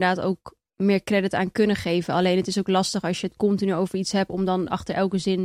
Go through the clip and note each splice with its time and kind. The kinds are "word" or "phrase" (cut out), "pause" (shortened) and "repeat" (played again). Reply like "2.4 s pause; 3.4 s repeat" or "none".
none

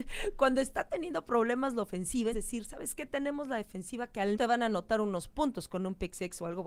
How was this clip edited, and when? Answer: 2.3 s word; 4.3 s phrase

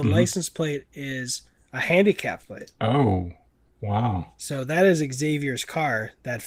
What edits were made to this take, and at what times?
2.4 s word

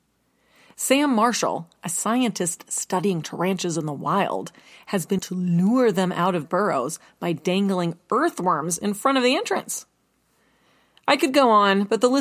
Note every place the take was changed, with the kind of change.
5.2 s word; 6.4 s word

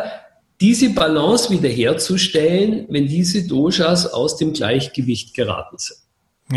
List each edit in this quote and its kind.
none

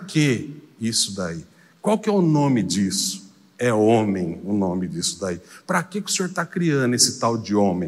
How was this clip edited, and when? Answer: none

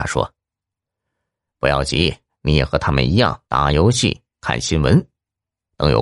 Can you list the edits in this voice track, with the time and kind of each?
2.3 s pause; 3.4 s pause

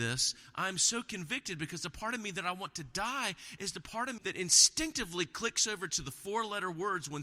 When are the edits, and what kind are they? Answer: 4.2 s word

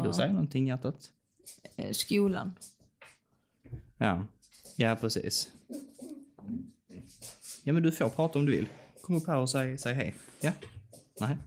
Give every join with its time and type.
none

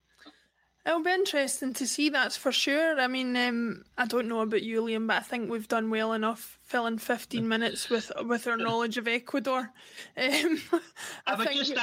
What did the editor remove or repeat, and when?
none

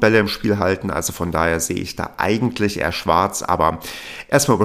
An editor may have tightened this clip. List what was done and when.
none

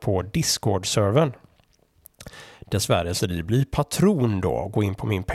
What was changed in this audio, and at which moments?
3.2 s word

